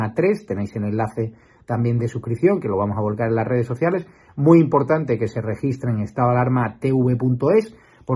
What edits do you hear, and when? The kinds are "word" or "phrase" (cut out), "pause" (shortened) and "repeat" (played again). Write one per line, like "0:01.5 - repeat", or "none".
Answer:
none